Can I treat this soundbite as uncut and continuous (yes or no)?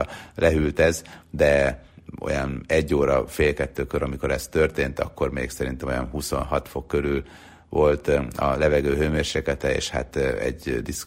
yes